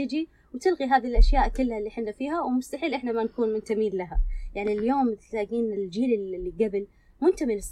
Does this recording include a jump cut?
no; 0 cuts

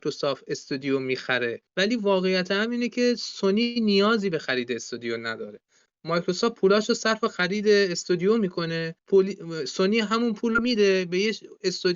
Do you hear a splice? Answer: yes; 2 cuts; at 1.7 s, 9.0 s

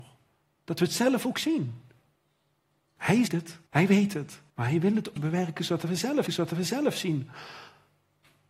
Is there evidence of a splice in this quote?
yes; 5 cuts; at 3.3 s, 3.7 s, 4.5 s, 5.2 s, 6.3 s

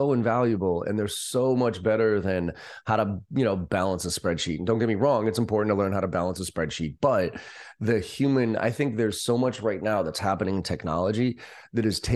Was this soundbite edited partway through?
no; 0 cuts

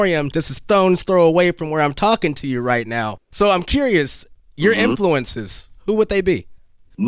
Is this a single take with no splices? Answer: yes; 0 cuts

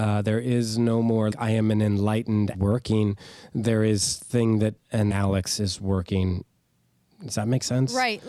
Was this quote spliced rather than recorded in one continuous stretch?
yes; 5 cuts; at 1.3 s, 2.5 s, 4.3 s, 4.8 s, 5.1 s

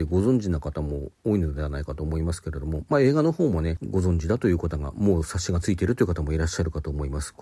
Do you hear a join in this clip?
no; 0 cuts

